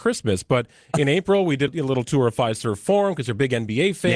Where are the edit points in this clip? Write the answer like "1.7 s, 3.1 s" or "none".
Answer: 1.7 s